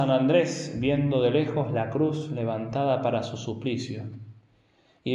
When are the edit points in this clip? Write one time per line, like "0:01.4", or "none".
none